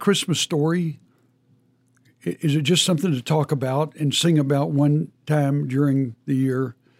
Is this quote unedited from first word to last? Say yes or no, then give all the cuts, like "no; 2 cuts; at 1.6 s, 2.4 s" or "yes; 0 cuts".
yes; 0 cuts